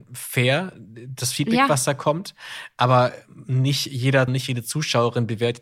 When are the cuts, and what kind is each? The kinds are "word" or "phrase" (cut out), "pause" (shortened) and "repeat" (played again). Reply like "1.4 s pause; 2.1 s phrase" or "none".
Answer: 4.3 s word